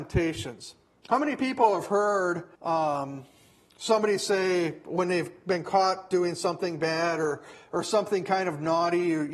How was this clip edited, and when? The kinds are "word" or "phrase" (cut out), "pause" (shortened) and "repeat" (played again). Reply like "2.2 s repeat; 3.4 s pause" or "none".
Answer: 2.5 s pause